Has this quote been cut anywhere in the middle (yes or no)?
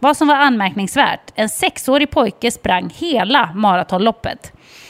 no